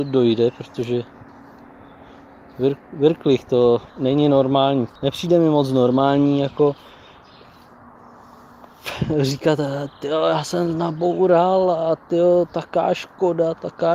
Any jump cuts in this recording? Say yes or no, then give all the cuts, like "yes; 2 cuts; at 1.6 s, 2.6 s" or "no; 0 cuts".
yes; 3 cuts; at 2.8 s, 3.9 s, 5.0 s